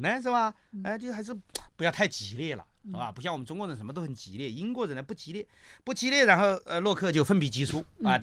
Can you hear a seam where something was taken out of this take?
no; 0 cuts

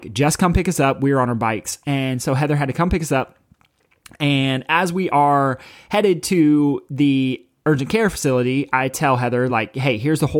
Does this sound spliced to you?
no; 0 cuts

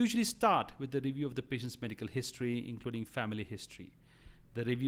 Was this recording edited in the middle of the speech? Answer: no; 0 cuts

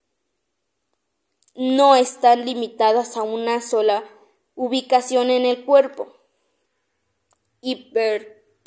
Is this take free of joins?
yes; 0 cuts

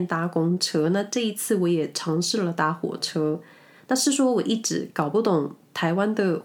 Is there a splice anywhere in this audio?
no; 0 cuts

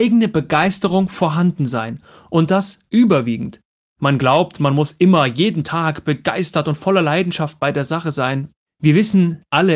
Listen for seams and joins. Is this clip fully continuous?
yes; 0 cuts

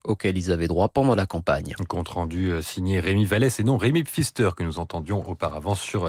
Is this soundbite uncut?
yes; 0 cuts

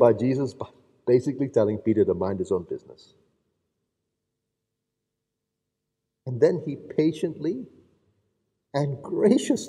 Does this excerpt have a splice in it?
no; 0 cuts

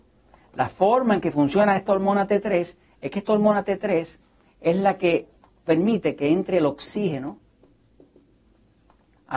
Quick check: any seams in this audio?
no; 0 cuts

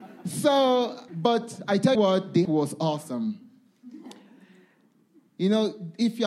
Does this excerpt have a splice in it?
yes; 3 cuts; at 1.1 s, 1.9 s, 2.4 s

